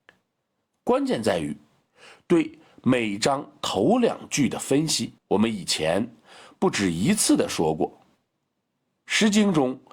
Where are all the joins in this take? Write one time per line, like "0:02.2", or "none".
0:05.2